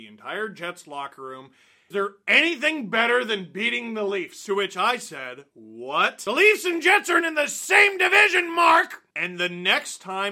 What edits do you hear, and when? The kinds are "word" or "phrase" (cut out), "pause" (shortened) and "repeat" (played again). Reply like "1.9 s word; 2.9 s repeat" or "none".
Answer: 1.9 s word; 5.5 s pause; 7.2 s word